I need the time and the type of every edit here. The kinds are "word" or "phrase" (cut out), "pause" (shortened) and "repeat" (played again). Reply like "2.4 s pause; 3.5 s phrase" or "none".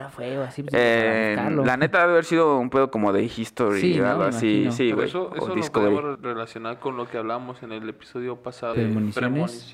6.1 s word; 8.7 s word